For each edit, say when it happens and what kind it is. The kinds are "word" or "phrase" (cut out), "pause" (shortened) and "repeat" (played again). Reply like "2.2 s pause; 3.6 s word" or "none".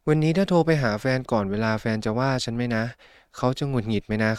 none